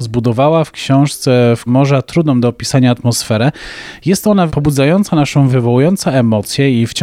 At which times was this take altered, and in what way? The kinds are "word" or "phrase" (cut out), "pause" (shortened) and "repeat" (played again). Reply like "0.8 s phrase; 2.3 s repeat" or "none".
1.7 s word; 4.5 s word; 5.5 s word